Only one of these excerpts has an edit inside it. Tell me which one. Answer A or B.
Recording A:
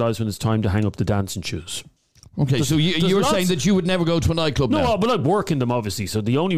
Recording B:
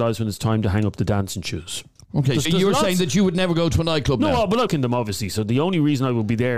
B